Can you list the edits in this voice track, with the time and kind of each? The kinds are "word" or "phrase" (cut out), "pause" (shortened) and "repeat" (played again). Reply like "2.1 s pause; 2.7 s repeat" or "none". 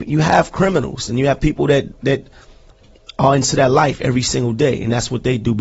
2.0 s word